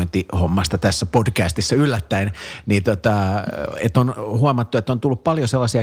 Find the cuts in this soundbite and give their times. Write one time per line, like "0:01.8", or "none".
none